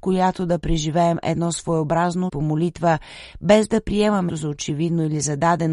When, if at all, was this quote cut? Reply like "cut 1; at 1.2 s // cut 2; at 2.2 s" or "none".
cut 1; at 2.3 s // cut 2; at 4.3 s